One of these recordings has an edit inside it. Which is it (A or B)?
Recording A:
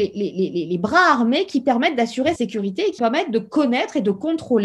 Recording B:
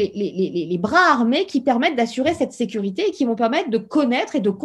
A